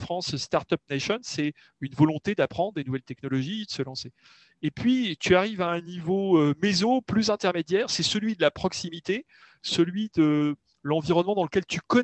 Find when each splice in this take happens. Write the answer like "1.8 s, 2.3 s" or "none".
none